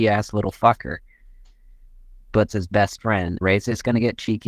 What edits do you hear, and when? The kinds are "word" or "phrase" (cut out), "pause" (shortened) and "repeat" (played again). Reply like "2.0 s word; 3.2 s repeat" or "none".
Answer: 2.5 s word; 3.4 s word